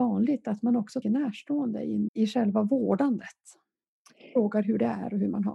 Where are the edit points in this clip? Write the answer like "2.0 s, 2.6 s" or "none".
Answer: 1.0 s, 2.1 s